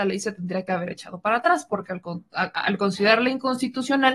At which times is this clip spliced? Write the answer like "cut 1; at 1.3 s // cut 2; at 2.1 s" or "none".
none